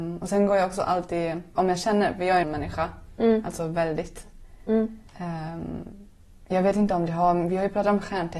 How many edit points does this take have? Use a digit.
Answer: 3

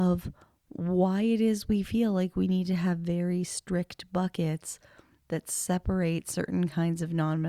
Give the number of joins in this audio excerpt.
0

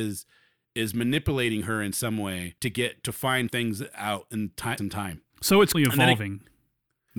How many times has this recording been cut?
5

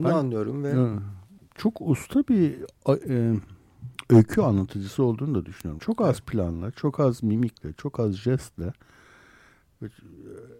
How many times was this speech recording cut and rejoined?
2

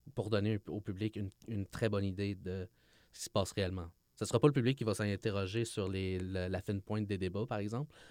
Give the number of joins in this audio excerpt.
0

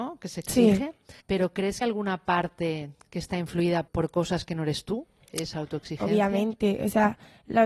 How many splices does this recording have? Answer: 3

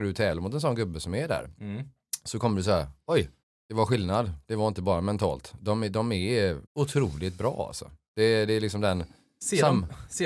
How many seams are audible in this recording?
2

